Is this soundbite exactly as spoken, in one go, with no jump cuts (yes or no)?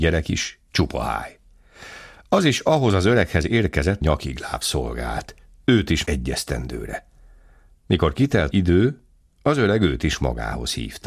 no